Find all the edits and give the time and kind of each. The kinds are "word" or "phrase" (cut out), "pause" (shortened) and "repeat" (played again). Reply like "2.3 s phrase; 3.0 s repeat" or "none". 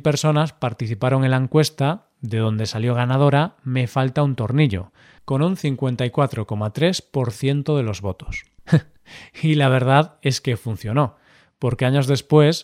none

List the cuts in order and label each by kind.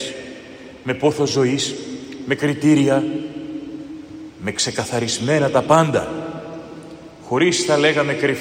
none

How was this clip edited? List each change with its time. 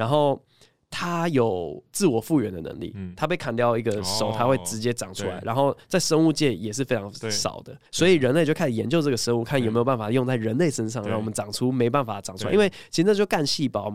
7.9 s pause

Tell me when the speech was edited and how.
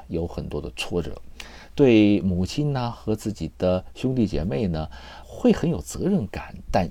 5.2 s word

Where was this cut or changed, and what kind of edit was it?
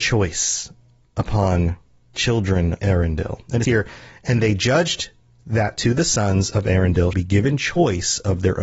2.1 s word; 2.8 s word; 3.6 s word; 7.1 s word

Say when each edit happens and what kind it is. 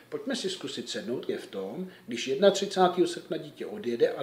1.3 s phrase

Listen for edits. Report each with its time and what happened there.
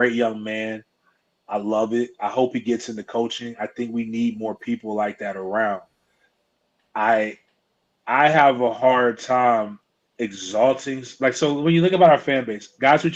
none

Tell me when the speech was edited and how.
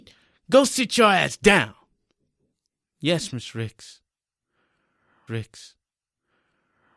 5.3 s repeat

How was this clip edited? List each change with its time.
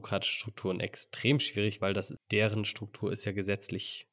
2.2 s word

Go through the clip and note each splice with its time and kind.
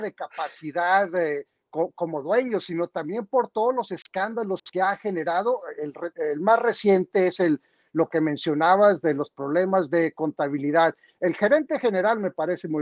6.1 s word

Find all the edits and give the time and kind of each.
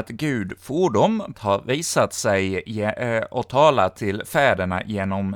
1.3 s phrase

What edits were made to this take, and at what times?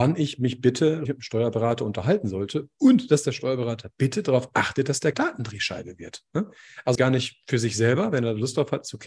1.1 s word; 5.1 s word; 7.0 s word

